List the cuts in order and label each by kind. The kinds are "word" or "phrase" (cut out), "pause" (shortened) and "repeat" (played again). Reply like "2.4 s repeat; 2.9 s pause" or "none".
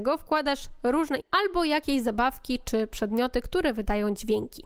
1.2 s word